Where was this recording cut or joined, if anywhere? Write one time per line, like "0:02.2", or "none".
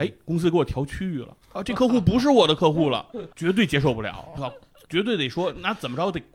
0:01.4
0:03.3
0:04.4